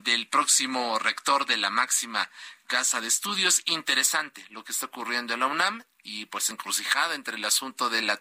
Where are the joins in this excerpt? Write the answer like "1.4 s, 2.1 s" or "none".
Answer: 6.5 s